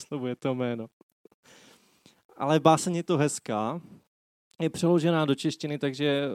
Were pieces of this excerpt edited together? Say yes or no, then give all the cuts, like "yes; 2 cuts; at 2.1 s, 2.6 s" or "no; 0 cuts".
no; 0 cuts